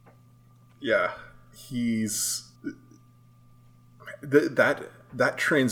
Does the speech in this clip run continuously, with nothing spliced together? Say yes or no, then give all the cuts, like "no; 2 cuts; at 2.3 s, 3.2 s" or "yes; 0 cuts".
no; 1 cut; at 2.6 s